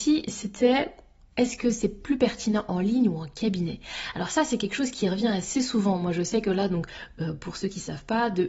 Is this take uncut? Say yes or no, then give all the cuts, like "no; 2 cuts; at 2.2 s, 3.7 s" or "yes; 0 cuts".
yes; 0 cuts